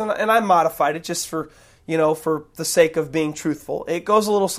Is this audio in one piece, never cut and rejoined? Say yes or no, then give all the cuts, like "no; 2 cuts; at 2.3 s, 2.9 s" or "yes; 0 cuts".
yes; 0 cuts